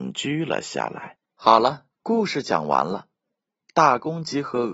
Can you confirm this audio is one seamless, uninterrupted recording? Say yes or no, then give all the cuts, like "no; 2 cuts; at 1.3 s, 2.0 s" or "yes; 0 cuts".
no; 2 cuts; at 1.2 s, 1.9 s